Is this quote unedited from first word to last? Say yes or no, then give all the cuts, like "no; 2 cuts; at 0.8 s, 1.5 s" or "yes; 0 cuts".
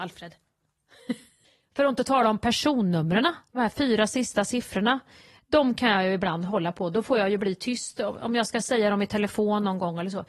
yes; 0 cuts